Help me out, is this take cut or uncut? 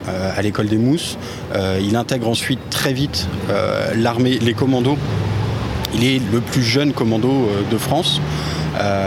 uncut